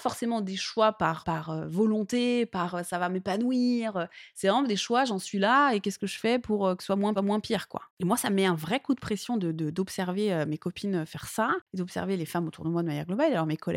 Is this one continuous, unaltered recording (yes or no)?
no